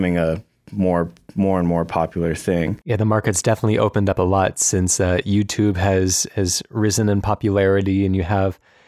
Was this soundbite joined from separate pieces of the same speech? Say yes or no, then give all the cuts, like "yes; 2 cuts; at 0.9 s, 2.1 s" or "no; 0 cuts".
no; 0 cuts